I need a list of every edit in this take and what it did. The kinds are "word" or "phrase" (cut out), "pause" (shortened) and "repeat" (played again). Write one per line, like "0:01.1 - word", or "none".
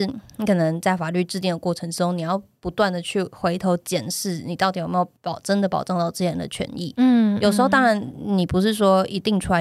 0:05.2 - pause